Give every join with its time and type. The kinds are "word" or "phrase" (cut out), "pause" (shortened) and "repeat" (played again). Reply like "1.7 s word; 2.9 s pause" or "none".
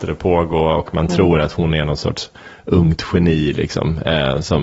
none